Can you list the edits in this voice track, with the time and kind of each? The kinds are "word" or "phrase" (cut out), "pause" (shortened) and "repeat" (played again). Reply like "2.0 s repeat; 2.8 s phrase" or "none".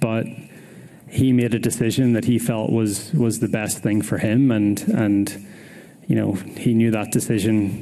none